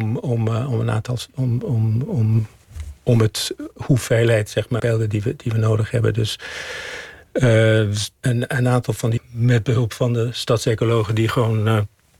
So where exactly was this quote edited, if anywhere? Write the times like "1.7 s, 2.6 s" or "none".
1.6 s, 3.0 s, 4.8 s, 8.2 s, 9.2 s